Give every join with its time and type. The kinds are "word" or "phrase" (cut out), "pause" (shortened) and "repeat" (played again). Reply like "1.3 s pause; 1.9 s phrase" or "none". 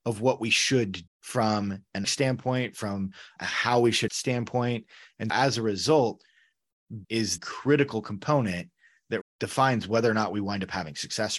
1.1 s word; 2.0 s word; 3.4 s word; 4.1 s word; 5.3 s word; 7.0 s word; 7.4 s word; 9.2 s word